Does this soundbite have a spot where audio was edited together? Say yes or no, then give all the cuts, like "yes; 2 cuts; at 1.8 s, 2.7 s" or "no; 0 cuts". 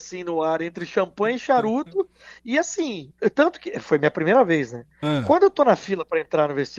no; 0 cuts